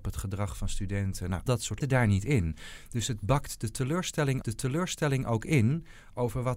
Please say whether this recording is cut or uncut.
cut